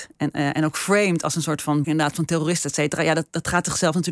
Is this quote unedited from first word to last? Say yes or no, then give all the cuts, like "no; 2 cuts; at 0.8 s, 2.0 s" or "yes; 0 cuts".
no; 1 cut; at 1.8 s